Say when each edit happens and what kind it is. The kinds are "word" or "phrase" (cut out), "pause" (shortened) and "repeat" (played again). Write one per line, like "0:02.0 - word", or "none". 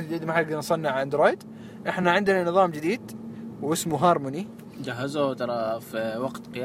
none